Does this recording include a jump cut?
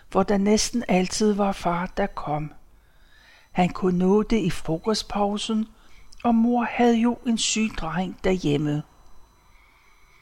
no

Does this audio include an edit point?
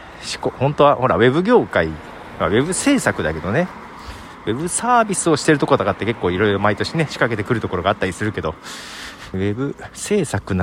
yes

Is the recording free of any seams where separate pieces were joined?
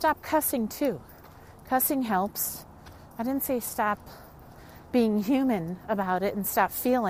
yes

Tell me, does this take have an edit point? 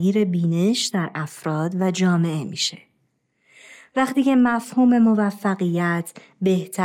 no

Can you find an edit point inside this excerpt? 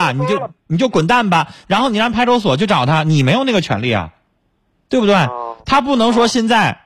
no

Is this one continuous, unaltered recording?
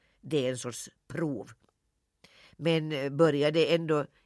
yes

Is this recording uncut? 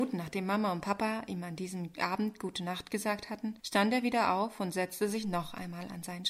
no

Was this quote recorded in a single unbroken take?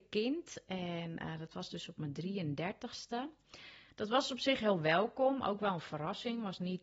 yes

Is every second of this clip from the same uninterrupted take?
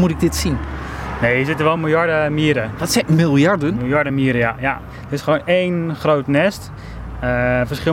yes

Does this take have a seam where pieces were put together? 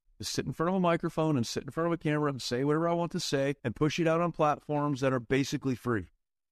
yes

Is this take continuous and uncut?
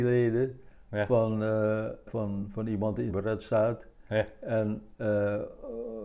no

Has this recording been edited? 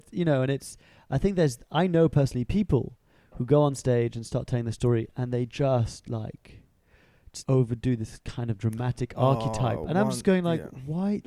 yes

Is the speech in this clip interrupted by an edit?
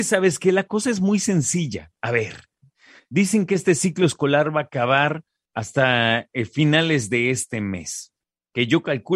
no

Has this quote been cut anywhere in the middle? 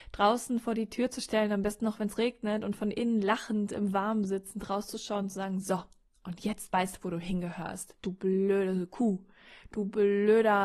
no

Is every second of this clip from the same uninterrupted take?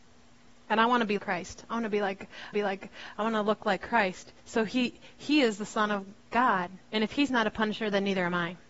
no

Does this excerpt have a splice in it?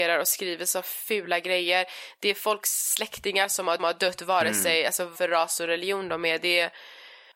yes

